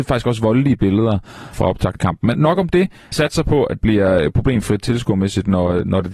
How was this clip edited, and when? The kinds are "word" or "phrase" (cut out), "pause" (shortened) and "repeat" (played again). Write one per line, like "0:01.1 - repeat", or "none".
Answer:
0:01.5 - word
0:02.0 - word
0:02.3 - word
0:03.1 - word
0:03.8 - word